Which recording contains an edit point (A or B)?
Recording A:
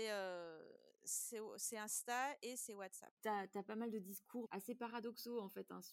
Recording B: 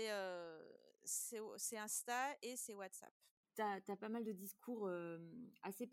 A